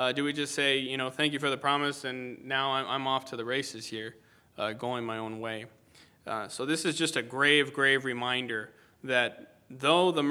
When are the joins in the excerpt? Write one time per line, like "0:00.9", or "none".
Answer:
none